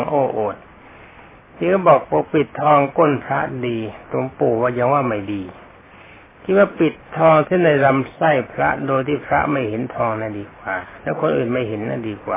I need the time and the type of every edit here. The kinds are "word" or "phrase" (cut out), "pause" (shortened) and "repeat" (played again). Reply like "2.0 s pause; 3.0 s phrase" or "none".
none